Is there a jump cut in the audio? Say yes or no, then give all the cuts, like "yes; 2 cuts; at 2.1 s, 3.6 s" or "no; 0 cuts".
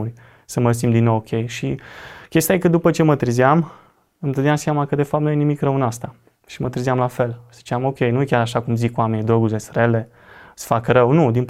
no; 0 cuts